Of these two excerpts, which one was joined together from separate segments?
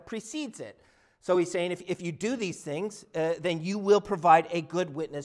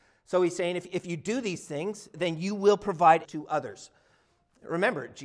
second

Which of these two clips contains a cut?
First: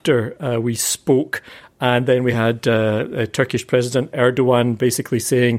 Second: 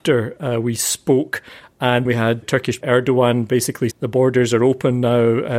second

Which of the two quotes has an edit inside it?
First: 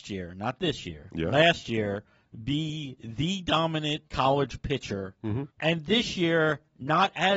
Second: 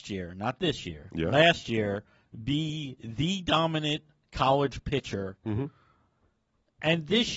first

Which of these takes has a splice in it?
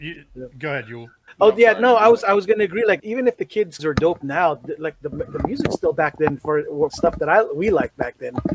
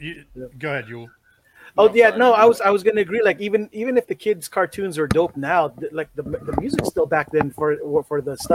first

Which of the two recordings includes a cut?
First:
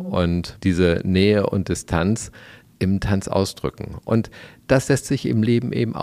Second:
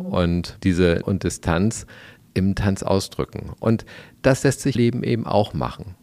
second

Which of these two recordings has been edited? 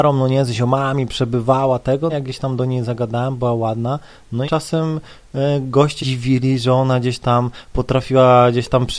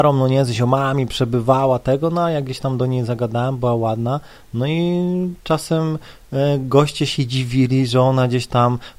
first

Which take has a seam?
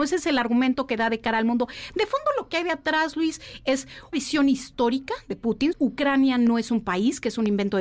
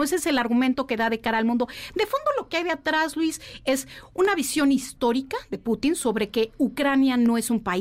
first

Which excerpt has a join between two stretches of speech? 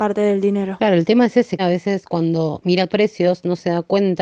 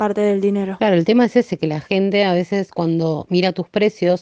first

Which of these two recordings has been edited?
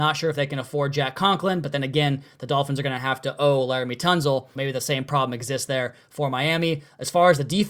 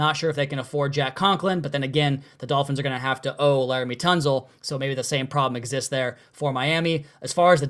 first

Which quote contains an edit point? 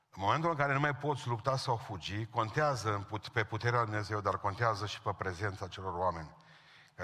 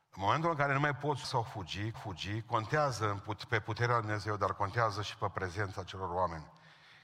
second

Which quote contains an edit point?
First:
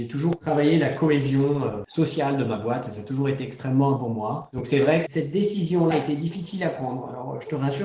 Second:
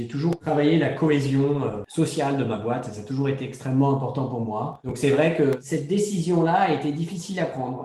first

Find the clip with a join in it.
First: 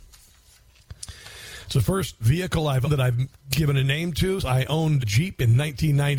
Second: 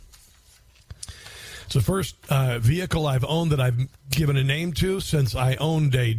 first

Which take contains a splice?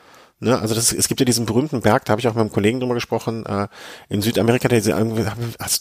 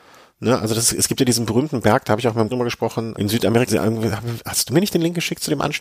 second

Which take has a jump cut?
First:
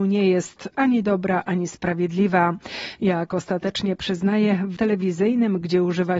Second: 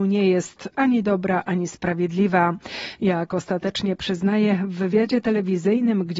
first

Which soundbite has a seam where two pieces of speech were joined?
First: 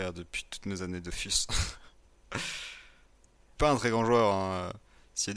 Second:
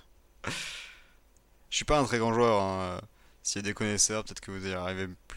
first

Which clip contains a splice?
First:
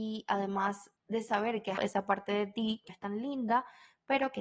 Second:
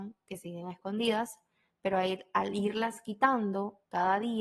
first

